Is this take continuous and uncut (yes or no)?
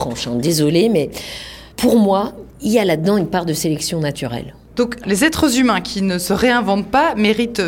no